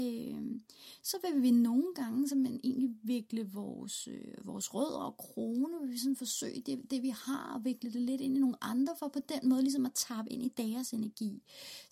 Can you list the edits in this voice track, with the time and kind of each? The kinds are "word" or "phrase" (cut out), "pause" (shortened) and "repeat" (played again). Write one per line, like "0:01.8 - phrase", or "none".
none

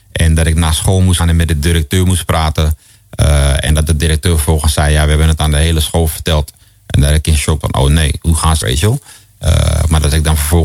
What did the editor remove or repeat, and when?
0:01.2 - word
0:07.6 - word
0:08.6 - word

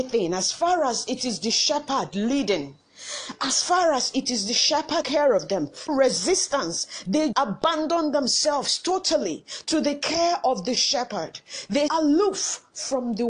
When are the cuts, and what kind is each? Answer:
0:05.0 - word
0:05.9 - word
0:07.3 - word
0:11.9 - word

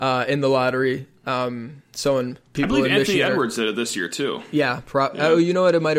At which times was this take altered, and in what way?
0:02.5 - pause

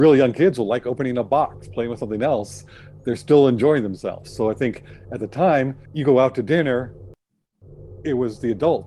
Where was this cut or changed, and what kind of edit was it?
0:05.9 - pause

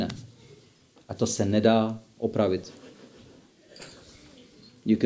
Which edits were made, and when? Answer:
none

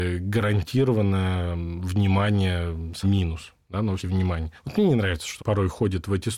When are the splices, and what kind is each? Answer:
0:03.0 - word
0:04.0 - word
0:05.4 - word

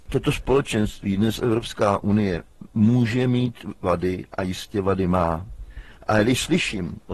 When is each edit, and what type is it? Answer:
none

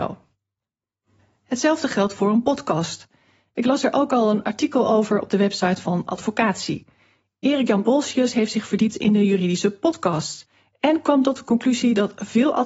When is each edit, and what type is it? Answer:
none

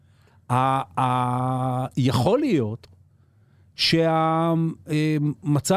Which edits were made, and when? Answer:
none

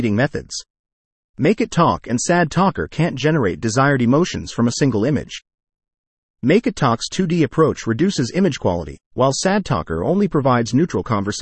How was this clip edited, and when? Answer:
none

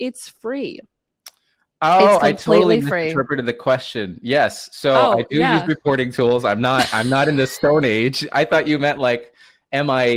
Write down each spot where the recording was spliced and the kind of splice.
none

